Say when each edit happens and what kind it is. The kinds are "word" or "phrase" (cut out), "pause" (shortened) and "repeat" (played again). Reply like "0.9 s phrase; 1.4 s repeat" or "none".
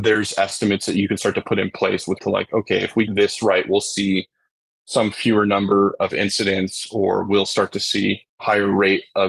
2.2 s word; 3.1 s word; 8.3 s pause